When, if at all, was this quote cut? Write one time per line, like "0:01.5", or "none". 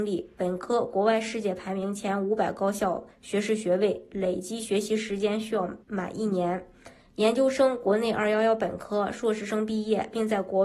0:03.1
0:05.8